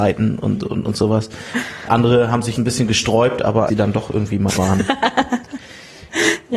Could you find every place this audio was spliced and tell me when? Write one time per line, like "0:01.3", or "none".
0:01.9
0:02.6
0:03.7
0:04.5